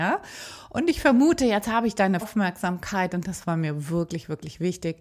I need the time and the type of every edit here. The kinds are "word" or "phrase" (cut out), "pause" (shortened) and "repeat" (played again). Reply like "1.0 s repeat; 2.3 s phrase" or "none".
2.2 s word